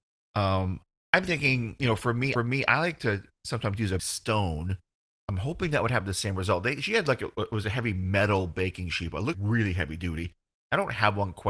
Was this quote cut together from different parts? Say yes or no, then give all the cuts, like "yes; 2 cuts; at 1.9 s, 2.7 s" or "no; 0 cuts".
yes; 3 cuts; at 2.4 s, 4.0 s, 9.3 s